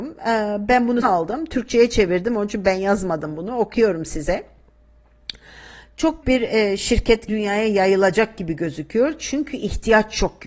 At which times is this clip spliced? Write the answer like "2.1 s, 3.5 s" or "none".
1.0 s, 6.2 s, 7.3 s